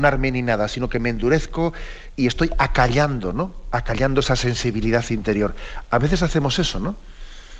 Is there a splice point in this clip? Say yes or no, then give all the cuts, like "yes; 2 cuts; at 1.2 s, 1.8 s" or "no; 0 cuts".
yes; 1 cut; at 2.1 s